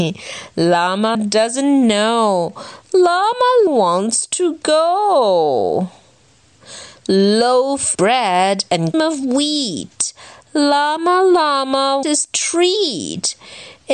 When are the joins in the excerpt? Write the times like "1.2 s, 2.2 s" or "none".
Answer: 1.1 s, 3.7 s, 7.9 s, 8.9 s, 12.0 s

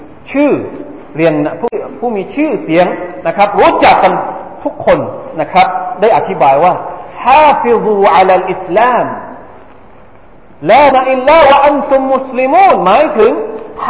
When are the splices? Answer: 10.9 s

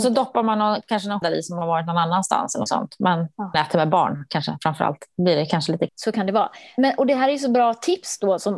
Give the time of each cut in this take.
1.2 s, 2.7 s, 3.5 s, 5.9 s

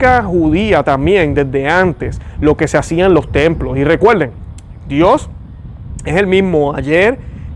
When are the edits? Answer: none

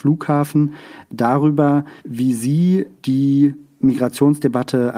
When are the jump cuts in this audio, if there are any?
2.0 s

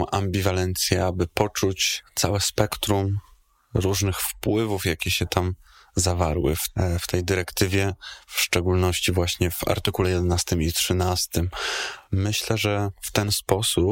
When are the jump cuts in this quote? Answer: 12.0 s

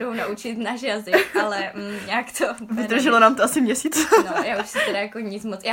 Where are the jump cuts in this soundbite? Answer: none

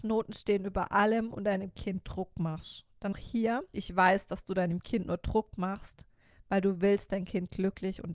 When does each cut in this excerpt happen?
3.1 s, 3.7 s, 7.1 s

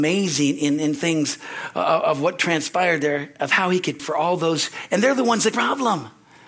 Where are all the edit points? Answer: 1.0 s, 4.0 s, 5.5 s

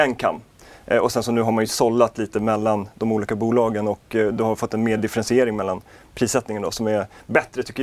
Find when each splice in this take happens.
none

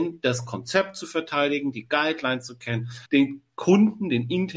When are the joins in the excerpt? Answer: 3.1 s

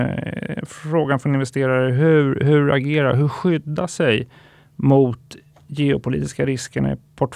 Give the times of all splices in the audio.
none

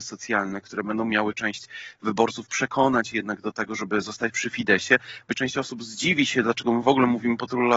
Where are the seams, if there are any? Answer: 5.3 s

